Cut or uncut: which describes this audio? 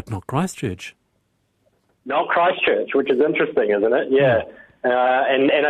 uncut